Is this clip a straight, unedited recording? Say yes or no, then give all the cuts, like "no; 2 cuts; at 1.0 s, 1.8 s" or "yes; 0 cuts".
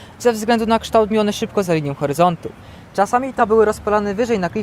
no; 3 cuts; at 1.1 s, 1.6 s, 3.4 s